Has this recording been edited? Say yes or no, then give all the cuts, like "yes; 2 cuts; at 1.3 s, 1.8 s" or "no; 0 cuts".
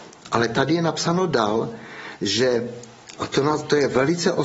no; 0 cuts